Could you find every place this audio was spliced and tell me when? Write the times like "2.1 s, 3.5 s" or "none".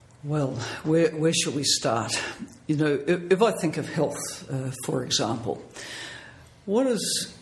none